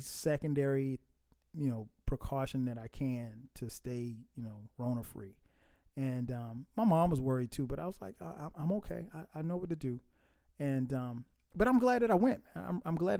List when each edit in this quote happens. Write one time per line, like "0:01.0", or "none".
none